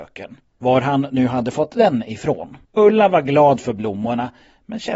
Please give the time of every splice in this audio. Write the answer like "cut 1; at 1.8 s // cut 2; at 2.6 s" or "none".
cut 1; at 2.6 s